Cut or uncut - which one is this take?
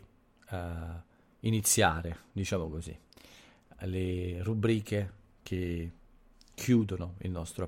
uncut